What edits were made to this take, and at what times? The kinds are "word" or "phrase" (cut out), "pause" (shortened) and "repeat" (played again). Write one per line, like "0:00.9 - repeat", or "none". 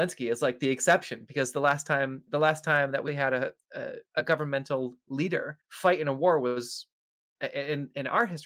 0:02.3 - word
0:03.1 - word
0:04.1 - pause
0:05.6 - pause